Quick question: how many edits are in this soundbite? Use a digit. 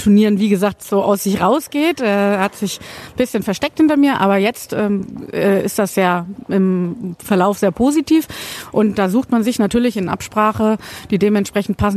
0